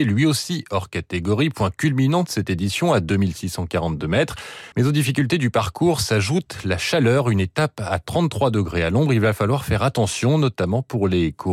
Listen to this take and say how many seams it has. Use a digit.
1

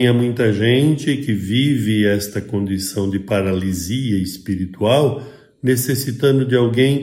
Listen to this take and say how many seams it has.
0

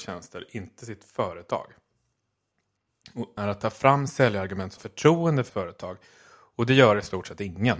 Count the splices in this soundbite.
3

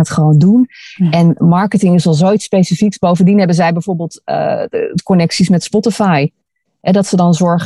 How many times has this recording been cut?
0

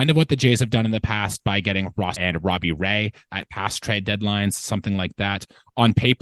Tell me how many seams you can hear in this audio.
1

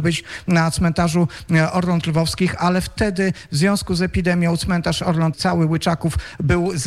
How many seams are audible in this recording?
1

